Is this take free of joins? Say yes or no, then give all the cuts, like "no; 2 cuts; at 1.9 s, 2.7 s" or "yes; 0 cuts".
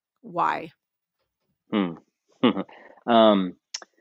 no; 1 cut; at 2.7 s